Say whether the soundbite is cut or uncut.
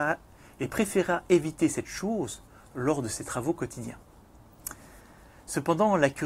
uncut